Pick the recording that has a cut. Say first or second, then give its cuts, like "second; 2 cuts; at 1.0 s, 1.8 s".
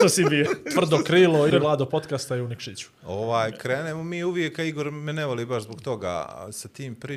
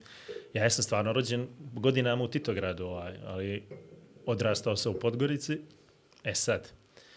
first; 1 cut; at 1.5 s